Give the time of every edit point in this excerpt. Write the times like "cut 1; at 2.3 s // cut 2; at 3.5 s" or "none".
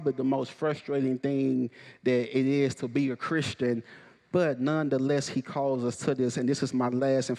none